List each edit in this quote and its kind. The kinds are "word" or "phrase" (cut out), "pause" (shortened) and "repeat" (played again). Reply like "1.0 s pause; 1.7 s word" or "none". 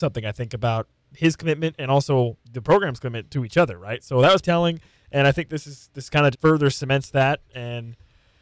2.4 s pause; 3.3 s word; 4.4 s word; 6.3 s word